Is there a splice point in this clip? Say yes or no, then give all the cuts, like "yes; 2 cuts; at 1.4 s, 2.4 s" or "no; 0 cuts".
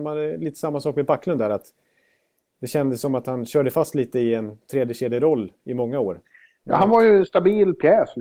no; 0 cuts